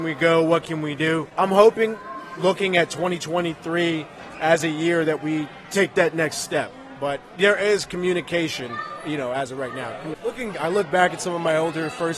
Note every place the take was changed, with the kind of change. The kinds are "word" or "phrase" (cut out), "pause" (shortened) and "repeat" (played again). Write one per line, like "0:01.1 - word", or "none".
0:10.5 - word